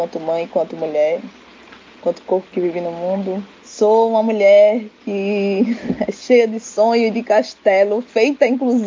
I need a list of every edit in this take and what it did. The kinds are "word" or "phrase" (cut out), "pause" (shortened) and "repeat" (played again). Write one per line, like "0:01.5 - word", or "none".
0:03.6 - pause